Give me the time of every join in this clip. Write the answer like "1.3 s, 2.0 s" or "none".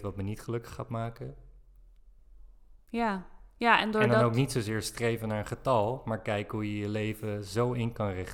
none